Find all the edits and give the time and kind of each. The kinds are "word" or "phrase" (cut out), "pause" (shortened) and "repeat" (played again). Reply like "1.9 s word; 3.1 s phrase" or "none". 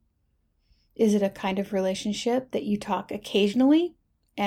none